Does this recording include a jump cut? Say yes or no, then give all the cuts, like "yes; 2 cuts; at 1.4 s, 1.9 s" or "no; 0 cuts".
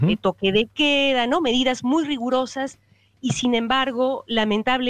no; 0 cuts